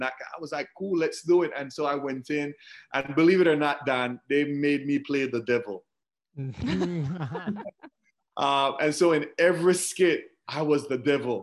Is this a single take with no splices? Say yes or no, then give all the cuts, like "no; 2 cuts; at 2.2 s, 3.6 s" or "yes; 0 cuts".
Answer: yes; 0 cuts